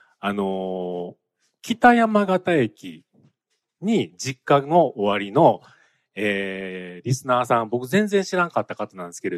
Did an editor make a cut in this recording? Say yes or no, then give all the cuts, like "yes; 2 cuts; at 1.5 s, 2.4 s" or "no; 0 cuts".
no; 0 cuts